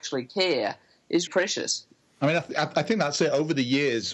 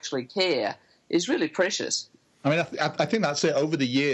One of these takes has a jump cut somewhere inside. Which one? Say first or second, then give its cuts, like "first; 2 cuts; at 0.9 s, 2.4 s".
first; 1 cut; at 1.3 s